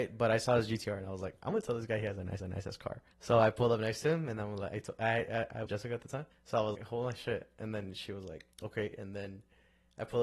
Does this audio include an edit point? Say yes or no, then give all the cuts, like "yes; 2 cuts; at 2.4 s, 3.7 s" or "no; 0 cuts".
yes; 6 cuts; at 2.4 s, 3.1 s, 5.7 s, 6.3 s, 6.7 s, 8.5 s